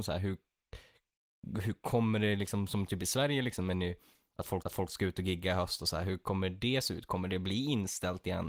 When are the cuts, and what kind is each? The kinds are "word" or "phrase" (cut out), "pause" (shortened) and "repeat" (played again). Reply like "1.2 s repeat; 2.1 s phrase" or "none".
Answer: 4.6 s repeat